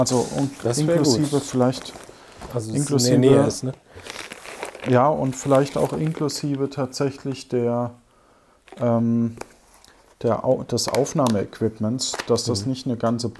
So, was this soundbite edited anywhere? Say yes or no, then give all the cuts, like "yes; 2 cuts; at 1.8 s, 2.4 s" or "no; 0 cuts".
no; 0 cuts